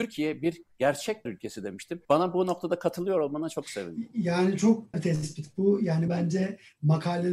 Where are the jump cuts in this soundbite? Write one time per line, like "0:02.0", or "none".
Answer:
0:01.3
0:02.0
0:04.9
0:06.1